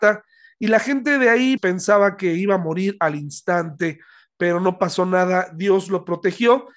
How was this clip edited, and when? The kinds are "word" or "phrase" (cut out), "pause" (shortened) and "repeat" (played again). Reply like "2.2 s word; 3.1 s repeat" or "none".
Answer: 1.6 s word

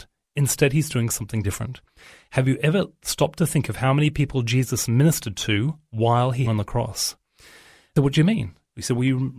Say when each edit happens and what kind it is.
1.4 s word; 6.5 s word; 8.0 s word

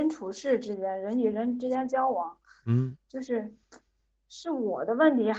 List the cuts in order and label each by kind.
none

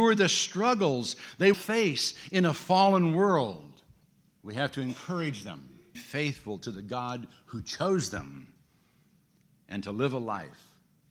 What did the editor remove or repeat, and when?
1.5 s word; 4.0 s pause; 5.9 s phrase

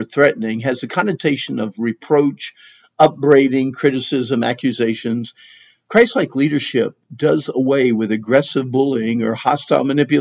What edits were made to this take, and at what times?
none

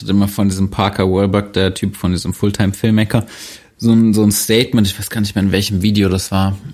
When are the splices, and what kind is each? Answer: none

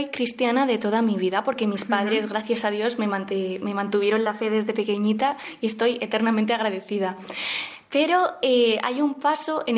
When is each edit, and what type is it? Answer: none

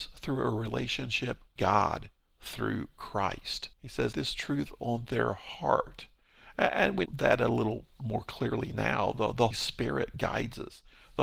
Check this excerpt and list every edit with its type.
1.6 s word; 3.7 s pause; 4.1 s phrase; 7.1 s word; 9.5 s word

